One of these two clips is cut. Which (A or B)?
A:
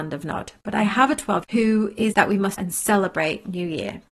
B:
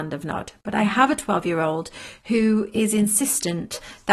A